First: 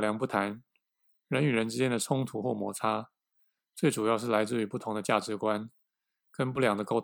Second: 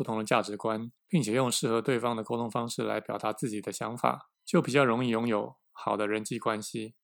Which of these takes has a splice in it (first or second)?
second